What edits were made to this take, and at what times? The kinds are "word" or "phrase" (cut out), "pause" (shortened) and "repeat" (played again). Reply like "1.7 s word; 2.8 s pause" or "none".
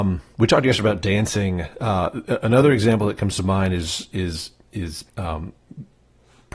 5.1 s pause